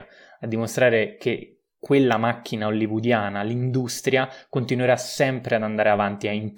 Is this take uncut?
yes; 0 cuts

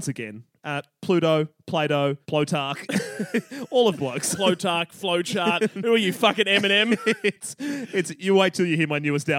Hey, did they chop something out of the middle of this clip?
yes; 2 cuts; at 2.2 s, 4.0 s

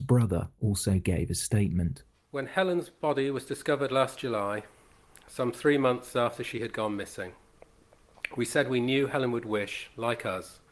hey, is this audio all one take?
yes; 0 cuts

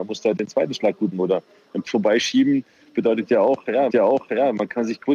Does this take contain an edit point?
yes; 3 cuts; at 1.1 s, 1.8 s, 3.9 s

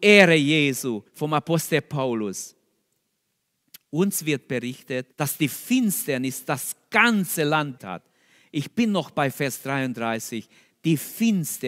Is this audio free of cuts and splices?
no; 3 cuts; at 1.1 s, 5.1 s, 7.8 s

